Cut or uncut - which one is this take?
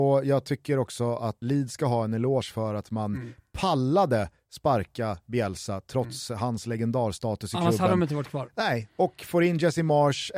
cut